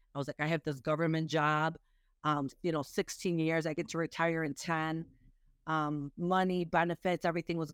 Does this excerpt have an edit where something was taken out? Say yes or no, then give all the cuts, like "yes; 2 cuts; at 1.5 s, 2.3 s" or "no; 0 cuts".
no; 0 cuts